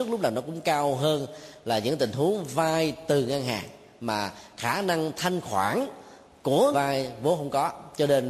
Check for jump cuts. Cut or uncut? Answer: cut